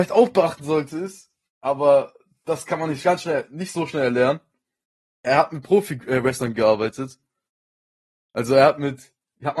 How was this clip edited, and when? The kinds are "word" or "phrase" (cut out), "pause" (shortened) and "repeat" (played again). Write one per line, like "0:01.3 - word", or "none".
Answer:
none